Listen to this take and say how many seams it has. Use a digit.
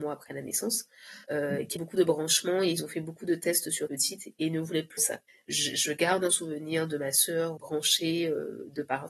6